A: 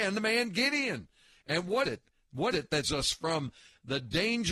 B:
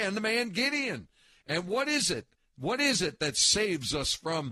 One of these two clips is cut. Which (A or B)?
A